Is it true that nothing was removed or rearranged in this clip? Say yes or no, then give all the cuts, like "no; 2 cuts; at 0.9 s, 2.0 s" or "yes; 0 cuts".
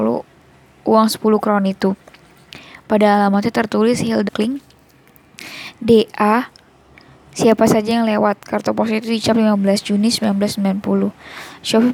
no; 1 cut; at 4.3 s